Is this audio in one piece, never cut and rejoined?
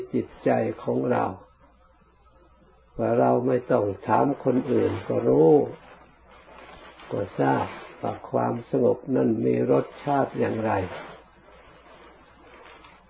yes; 0 cuts

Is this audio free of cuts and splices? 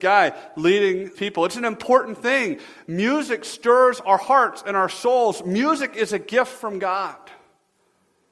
no; 1 cut; at 1.1 s

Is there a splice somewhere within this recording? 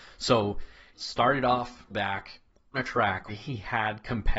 yes; 4 cuts; at 0.9 s, 1.9 s, 2.7 s, 3.3 s

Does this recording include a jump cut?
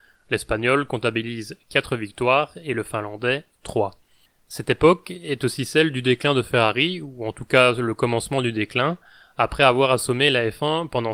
no; 0 cuts

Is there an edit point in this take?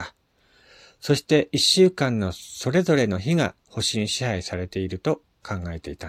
yes; 1 cut; at 3.6 s

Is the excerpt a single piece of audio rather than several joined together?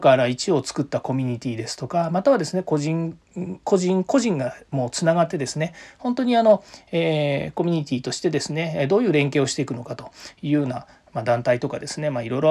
yes; 0 cuts

